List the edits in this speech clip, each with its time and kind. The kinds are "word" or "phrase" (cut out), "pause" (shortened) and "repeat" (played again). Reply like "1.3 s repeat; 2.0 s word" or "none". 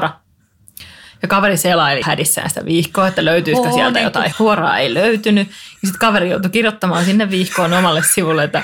2.0 s word; 4.3 s phrase